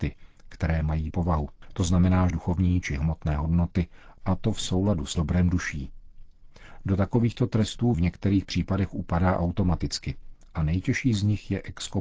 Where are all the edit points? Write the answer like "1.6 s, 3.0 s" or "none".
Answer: 1.1 s, 2.3 s, 5.1 s, 7.9 s